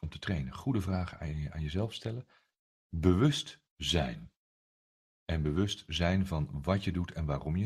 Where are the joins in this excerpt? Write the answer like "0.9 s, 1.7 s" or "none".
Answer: none